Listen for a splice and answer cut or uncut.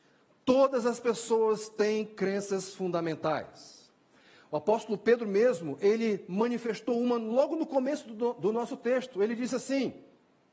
uncut